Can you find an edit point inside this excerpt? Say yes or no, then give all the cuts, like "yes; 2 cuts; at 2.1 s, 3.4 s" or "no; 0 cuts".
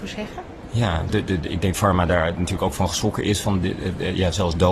yes; 2 cuts; at 1.1 s, 1.7 s